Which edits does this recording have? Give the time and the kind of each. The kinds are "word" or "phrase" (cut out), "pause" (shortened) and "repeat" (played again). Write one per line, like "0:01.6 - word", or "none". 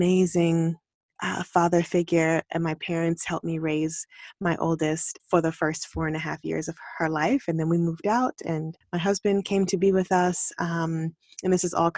0:05.2 - word
0:08.8 - pause